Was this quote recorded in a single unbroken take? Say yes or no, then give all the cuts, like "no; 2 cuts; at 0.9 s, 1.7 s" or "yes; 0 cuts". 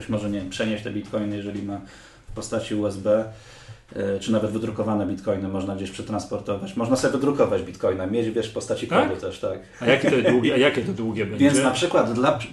yes; 0 cuts